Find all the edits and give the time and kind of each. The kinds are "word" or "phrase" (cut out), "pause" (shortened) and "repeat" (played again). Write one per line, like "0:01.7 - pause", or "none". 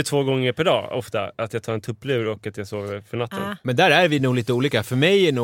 none